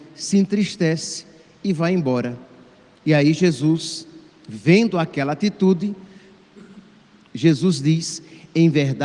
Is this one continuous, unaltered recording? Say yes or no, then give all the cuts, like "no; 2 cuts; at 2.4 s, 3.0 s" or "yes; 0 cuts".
yes; 0 cuts